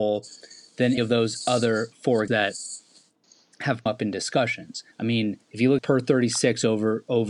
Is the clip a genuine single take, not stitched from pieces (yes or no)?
no